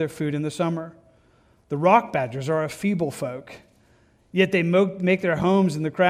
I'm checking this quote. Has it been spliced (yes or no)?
no